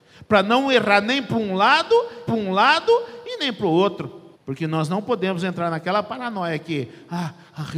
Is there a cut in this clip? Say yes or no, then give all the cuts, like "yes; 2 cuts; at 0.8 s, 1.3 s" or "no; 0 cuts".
yes; 2 cuts; at 2.3 s, 4.3 s